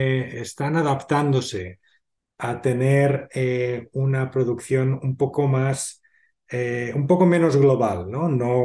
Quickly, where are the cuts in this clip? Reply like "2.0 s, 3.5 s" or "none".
none